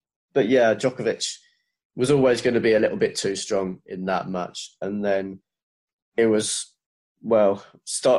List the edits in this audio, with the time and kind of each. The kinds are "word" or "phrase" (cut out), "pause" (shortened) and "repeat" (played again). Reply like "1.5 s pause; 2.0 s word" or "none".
none

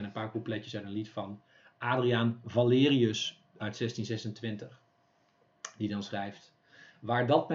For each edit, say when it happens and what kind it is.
none

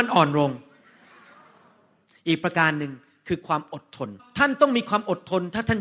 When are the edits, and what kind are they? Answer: 4.2 s pause

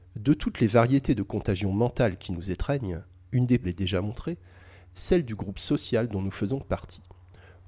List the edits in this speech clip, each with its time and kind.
3.6 s phrase

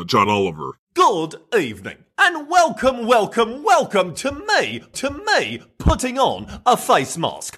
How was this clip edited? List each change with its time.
4.9 s repeat

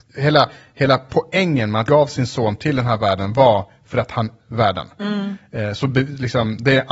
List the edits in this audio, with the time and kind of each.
1.9 s word; 4.4 s word

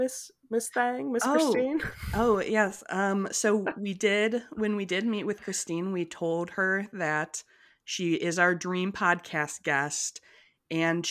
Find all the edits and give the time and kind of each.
none

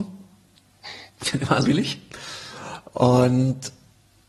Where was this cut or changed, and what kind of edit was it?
1.6 s word

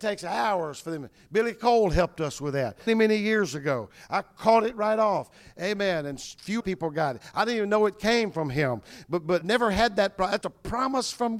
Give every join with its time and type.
2.9 s word; 6.6 s word; 9.4 s word; 10.4 s word

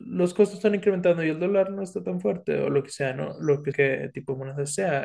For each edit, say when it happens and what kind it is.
3.7 s word

